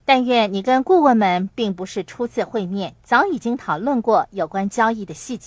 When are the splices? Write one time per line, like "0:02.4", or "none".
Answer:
0:03.0